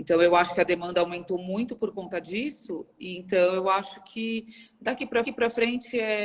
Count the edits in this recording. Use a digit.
1